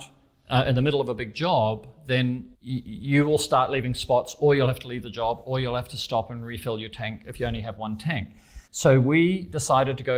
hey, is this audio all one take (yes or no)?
no